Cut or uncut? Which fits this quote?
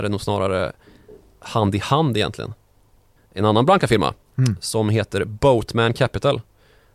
cut